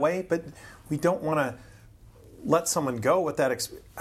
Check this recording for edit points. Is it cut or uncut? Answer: uncut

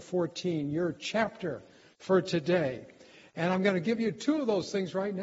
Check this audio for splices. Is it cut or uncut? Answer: uncut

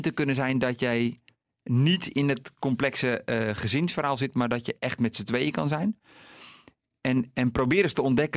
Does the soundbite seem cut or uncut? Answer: uncut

